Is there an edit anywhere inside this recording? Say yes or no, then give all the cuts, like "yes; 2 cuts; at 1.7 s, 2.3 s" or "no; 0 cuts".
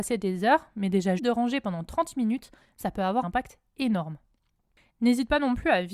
yes; 2 cuts; at 1.2 s, 3.2 s